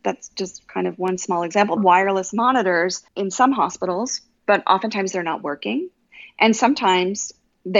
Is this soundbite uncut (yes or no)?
no